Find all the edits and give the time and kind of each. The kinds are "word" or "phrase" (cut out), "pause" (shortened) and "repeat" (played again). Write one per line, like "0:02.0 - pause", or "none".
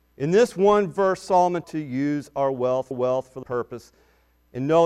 0:01.6 - phrase
0:02.9 - repeat
0:03.4 - word